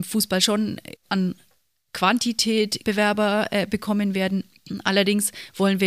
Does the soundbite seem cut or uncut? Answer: cut